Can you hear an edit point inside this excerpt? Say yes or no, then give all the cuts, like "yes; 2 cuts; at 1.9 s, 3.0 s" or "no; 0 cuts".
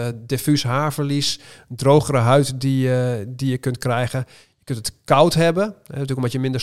no; 0 cuts